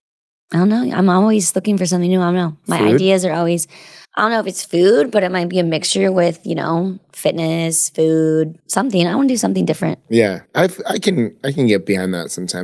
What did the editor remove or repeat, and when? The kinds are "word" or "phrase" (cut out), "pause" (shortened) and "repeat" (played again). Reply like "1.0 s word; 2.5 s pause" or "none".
4.0 s pause; 8.6 s pause; 10.5 s pause